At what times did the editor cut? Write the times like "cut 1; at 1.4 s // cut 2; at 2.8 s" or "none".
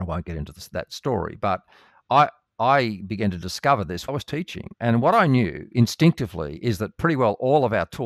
cut 1; at 4.1 s